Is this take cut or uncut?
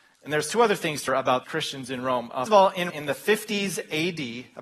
cut